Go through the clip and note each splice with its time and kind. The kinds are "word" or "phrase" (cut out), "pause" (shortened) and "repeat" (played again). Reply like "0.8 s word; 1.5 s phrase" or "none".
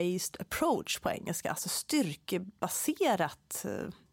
none